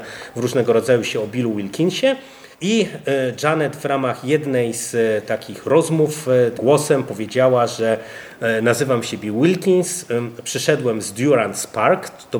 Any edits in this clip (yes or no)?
yes